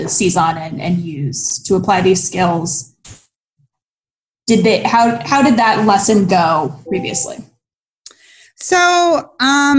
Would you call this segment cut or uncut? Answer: uncut